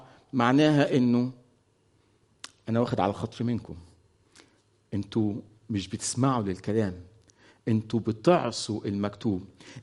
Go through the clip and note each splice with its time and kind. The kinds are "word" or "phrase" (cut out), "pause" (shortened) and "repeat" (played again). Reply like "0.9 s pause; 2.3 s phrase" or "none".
none

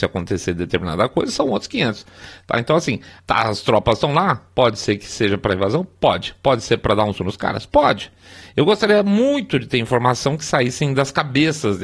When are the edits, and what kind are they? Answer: 3.2 s word; 7.2 s word

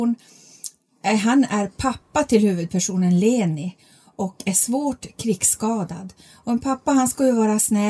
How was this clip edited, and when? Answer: none

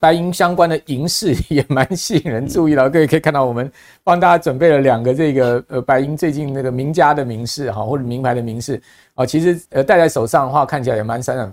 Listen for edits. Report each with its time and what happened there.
9.7 s pause

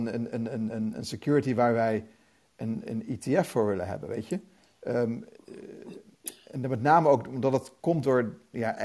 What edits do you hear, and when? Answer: none

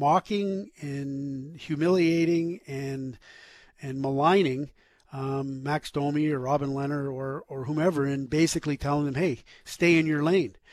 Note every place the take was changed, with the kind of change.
none

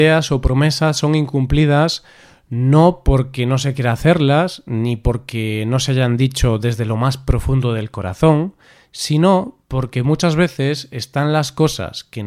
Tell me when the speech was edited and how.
none

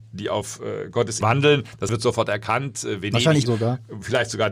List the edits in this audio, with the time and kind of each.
1.2 s word; 1.9 s phrase; 3.5 s phrase

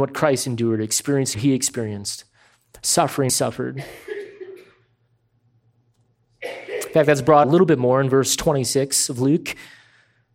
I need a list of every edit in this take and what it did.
1.3 s word; 3.3 s phrase; 7.4 s phrase

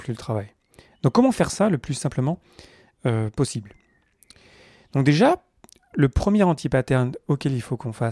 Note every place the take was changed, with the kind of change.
none

